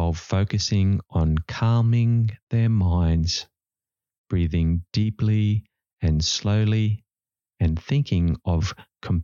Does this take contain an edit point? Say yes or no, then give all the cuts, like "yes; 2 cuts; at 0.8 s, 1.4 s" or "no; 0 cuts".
no; 0 cuts